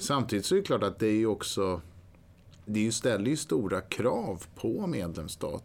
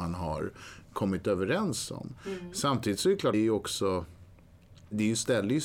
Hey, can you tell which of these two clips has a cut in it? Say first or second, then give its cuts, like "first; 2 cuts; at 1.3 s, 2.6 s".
second; 1 cut; at 3.3 s